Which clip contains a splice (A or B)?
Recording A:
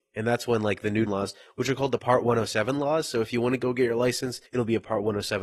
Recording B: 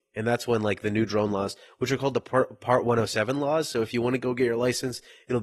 A